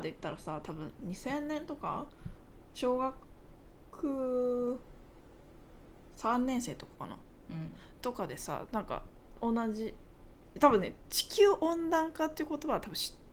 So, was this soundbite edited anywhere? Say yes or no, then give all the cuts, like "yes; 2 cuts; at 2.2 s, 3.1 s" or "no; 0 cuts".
yes; 1 cut; at 9.4 s